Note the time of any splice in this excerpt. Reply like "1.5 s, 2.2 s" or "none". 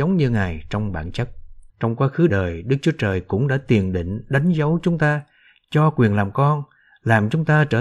1.7 s, 2.3 s